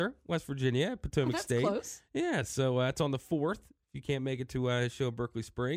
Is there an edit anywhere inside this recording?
no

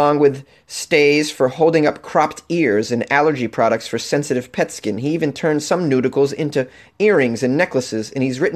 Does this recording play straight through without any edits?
yes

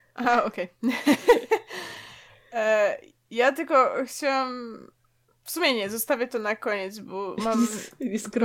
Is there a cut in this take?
no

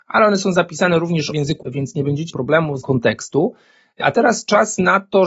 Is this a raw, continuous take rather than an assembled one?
no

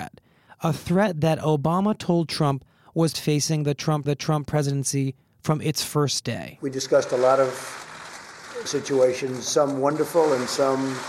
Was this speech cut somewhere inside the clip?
yes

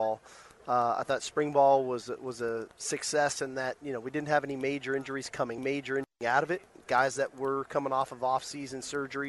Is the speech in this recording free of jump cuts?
yes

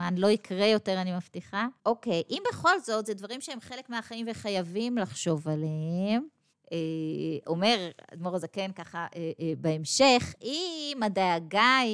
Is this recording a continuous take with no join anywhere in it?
no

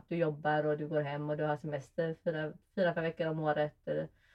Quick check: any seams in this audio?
no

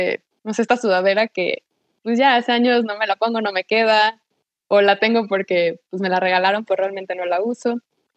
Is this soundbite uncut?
yes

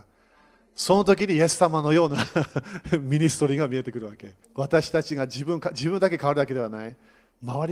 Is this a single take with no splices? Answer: no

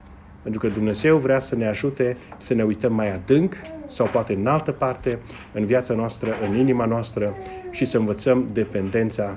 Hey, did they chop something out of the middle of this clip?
no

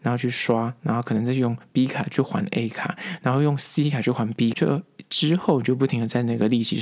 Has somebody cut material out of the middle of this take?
yes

